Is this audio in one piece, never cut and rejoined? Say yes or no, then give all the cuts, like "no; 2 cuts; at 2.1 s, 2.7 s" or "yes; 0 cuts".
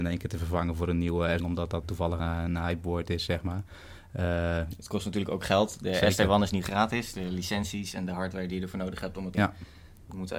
no; 4 cuts; at 1.4 s, 1.8 s, 2.2 s, 9.3 s